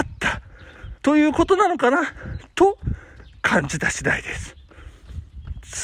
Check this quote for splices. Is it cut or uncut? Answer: cut